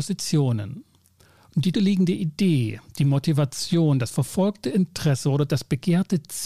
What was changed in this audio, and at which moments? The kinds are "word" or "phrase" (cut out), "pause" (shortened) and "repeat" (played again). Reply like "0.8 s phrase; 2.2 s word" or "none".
1.7 s word